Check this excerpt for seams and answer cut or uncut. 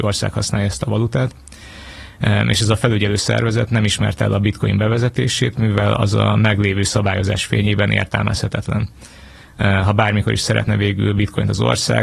uncut